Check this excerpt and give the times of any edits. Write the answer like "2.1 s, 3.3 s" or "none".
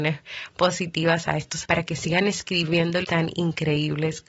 1.6 s, 3.0 s

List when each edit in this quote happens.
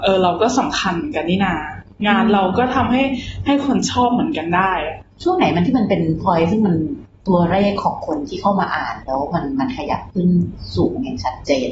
6.2 s

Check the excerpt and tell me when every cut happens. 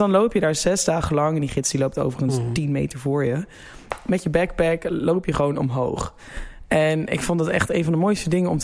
none

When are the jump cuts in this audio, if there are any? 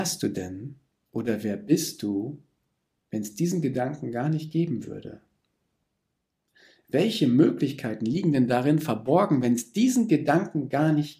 none

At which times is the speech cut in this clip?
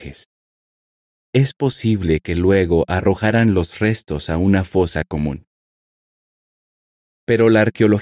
none

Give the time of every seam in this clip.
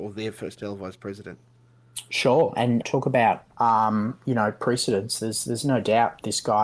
2.8 s, 3.5 s

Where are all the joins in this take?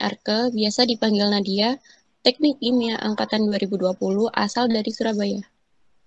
none

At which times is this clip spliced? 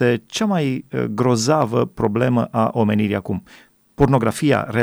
none

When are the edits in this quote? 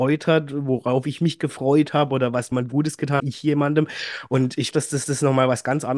2.5 s, 3.2 s, 4.7 s, 5.0 s

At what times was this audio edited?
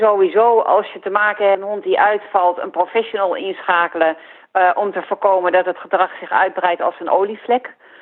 1.5 s

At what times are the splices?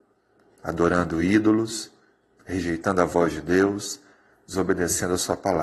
none

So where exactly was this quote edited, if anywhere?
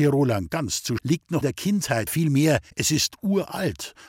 1.0 s, 1.4 s, 2.1 s, 2.7 s

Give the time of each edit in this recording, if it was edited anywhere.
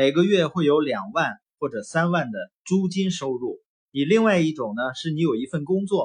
2.6 s, 3.7 s

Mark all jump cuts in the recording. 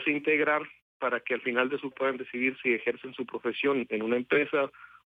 1.9 s

